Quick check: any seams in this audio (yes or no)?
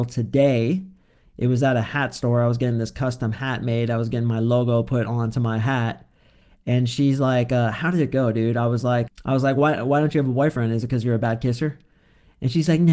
yes